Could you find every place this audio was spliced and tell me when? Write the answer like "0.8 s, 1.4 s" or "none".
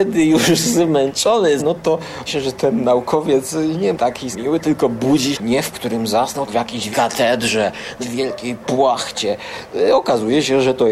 1.6 s, 2.3 s, 3.9 s, 4.3 s, 5.3 s, 5.7 s, 6.5 s, 6.9 s, 8.0 s